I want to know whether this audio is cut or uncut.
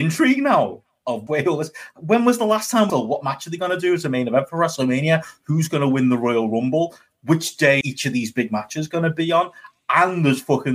cut